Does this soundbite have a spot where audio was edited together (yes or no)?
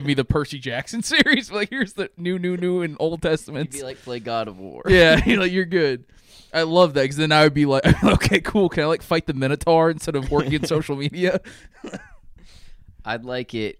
no